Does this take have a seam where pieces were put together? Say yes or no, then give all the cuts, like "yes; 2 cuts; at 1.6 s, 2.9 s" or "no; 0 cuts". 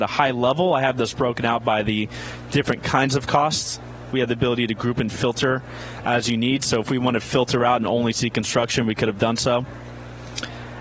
no; 0 cuts